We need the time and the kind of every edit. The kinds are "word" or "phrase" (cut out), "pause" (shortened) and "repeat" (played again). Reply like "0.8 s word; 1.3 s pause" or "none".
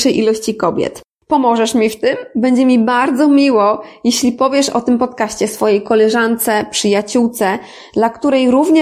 none